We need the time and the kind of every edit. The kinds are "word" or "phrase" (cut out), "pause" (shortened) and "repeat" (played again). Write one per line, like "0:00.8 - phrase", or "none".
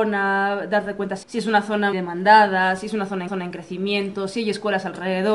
0:01.2 - word
0:01.9 - word
0:03.3 - repeat